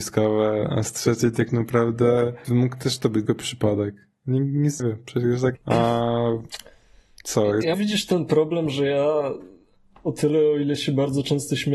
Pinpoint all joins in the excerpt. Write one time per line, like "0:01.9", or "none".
0:02.4
0:03.3
0:04.8
0:05.5
0:07.7